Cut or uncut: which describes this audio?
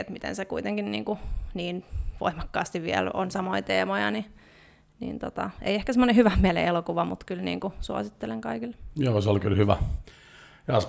uncut